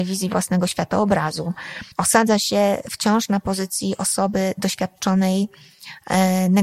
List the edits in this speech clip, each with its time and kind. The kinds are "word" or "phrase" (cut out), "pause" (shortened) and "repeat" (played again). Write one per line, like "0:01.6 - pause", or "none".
0:01.9 - pause

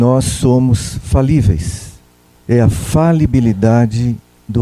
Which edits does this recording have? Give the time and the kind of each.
0:02.2 - pause

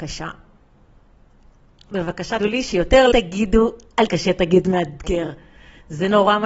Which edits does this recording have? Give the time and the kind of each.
0:02.4 - word
0:03.1 - word
0:04.1 - word

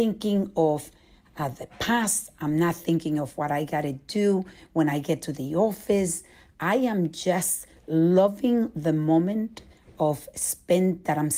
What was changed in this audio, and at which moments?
none

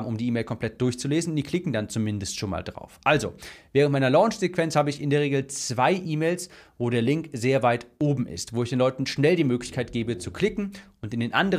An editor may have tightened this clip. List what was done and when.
none

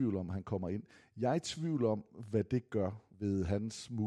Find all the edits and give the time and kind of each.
0:03.1 - pause

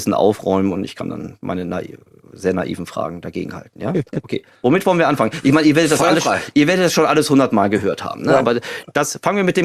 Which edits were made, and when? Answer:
none

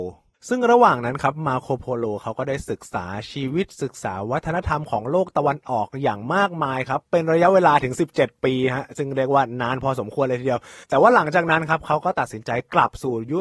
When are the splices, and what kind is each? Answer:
0:10.8 - pause

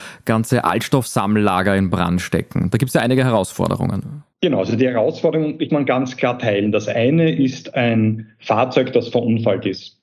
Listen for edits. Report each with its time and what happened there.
0:04.3 - pause
0:05.7 - phrase

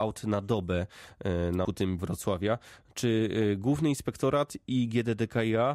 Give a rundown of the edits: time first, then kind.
0:01.6 - word
0:02.0 - phrase

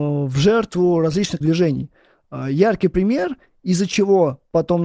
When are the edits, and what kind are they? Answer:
0:01.4 - word

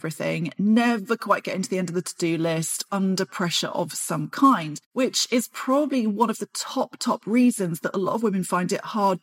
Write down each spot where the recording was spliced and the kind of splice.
0:02.9 - word

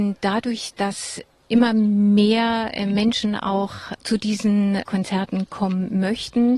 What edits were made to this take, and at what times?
none

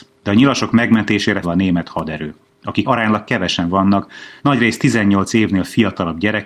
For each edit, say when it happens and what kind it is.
0:01.4 - word
0:02.8 - word
0:04.4 - pause

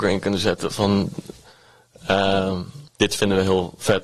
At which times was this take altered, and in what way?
0:02.9 - pause

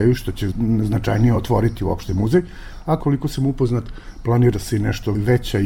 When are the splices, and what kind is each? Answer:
none

